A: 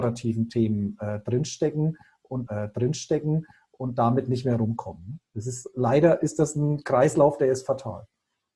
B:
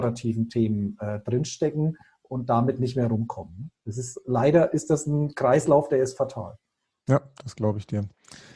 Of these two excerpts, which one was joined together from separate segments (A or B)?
A